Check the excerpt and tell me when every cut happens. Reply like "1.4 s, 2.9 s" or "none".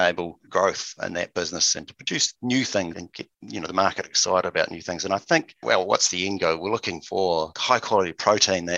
2.9 s, 3.3 s, 5.6 s